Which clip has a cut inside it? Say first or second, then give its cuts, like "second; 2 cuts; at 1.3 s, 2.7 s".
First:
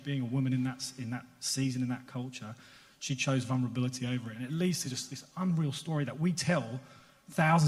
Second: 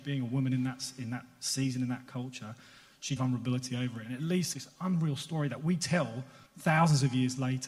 second; 3 cuts; at 3.2 s, 4.5 s, 6.5 s